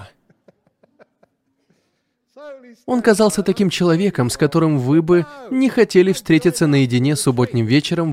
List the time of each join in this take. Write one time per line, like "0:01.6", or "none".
none